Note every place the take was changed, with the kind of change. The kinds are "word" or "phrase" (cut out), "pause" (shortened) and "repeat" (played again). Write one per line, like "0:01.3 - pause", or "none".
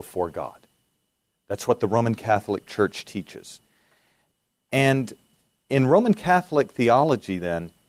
none